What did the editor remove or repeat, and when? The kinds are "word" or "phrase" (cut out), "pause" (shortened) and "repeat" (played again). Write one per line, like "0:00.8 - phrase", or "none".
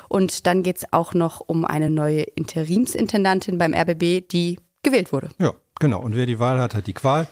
none